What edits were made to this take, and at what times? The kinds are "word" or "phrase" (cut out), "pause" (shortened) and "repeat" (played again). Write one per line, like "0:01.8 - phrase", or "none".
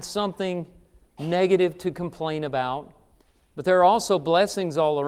none